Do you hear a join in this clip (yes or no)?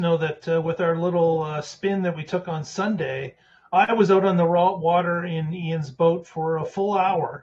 no